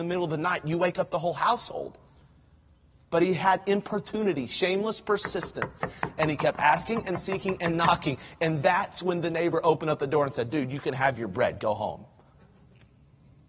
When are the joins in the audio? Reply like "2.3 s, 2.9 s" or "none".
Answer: none